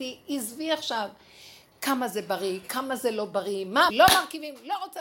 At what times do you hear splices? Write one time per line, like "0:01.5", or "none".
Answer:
0:03.9